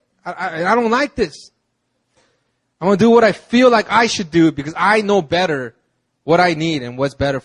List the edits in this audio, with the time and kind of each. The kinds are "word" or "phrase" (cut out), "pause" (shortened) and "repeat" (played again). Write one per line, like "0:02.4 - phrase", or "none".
none